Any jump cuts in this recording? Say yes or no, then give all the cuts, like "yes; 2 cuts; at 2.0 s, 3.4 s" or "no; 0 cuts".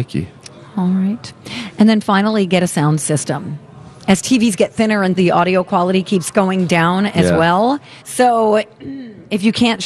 yes; 2 cuts; at 5.2 s, 8.0 s